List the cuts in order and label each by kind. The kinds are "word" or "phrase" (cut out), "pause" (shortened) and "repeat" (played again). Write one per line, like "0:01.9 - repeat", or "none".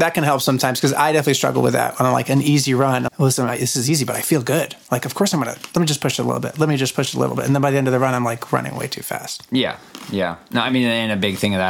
0:03.1 - word